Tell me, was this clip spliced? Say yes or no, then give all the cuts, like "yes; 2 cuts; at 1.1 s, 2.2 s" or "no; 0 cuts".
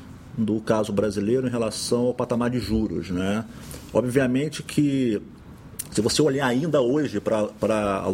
no; 0 cuts